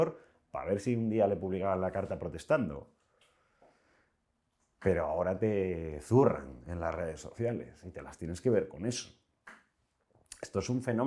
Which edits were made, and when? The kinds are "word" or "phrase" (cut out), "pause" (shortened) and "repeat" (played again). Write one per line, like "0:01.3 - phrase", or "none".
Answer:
none